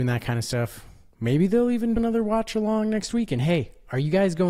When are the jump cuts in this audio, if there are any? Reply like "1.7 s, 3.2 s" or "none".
2.0 s